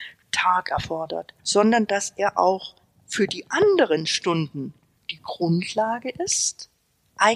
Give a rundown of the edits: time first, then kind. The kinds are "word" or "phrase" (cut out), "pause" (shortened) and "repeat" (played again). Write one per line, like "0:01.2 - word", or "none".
0:01.4 - pause
0:02.8 - pause
0:05.0 - pause